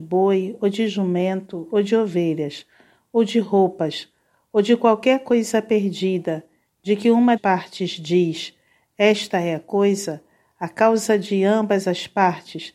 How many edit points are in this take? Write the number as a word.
one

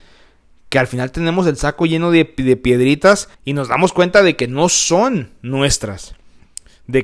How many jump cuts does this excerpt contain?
one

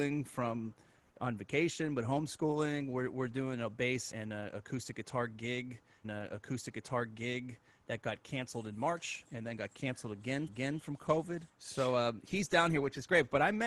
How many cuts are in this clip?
four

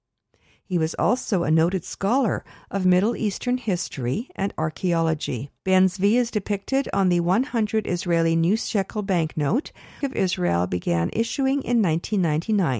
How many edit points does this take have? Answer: two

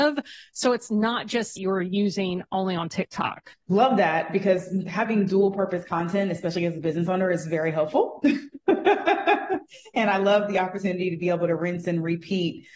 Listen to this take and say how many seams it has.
two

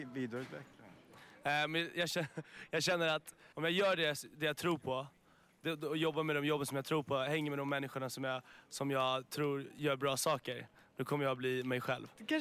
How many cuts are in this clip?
one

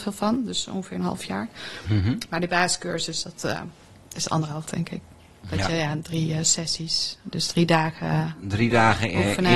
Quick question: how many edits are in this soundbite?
two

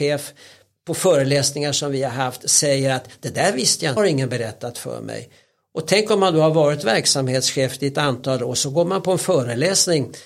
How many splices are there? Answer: one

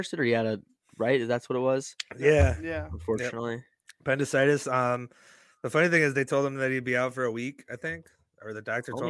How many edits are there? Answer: zero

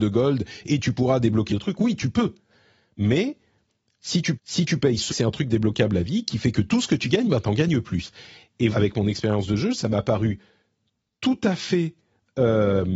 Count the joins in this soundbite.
four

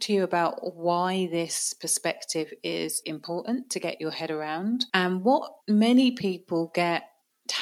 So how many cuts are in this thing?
three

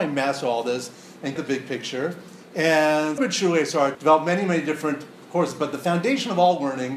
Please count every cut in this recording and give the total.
three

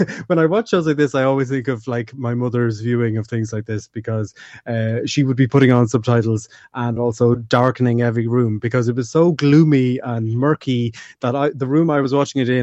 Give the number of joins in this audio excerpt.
zero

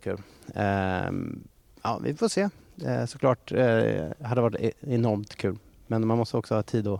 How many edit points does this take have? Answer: zero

